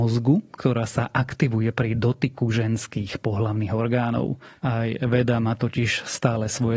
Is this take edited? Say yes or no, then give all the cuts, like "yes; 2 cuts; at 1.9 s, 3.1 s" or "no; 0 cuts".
no; 0 cuts